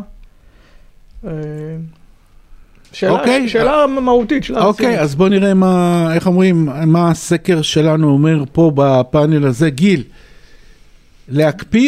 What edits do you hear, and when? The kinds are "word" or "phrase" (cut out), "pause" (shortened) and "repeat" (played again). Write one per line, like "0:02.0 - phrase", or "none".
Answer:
none